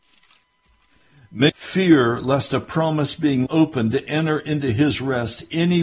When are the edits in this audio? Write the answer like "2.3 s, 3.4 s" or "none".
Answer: 1.5 s, 3.5 s